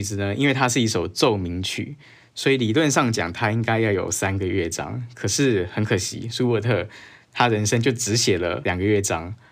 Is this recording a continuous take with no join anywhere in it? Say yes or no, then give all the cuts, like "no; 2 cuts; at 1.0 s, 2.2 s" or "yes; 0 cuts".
yes; 0 cuts